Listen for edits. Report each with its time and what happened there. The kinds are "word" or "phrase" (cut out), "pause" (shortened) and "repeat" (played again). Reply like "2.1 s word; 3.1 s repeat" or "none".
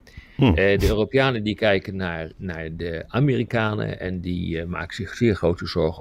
2.3 s word